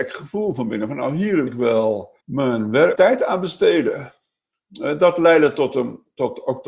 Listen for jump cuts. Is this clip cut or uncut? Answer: cut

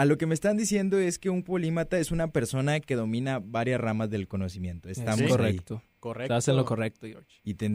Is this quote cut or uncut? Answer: uncut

